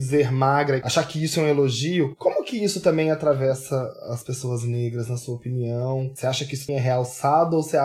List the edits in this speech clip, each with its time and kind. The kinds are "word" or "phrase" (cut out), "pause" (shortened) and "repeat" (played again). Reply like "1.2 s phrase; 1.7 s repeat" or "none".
6.7 s word